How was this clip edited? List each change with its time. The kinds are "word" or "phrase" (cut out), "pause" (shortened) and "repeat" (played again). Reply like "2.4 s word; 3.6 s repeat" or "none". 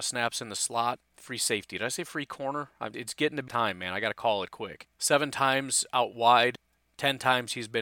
2.9 s word; 3.5 s word; 4.9 s pause